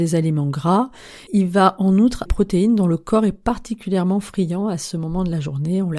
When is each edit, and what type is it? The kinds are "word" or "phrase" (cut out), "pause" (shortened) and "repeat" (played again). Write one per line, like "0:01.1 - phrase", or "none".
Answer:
0:01.3 - word
0:02.3 - phrase